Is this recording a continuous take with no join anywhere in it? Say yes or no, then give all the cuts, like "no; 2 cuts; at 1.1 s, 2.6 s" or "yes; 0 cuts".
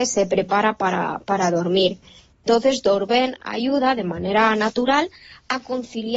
yes; 0 cuts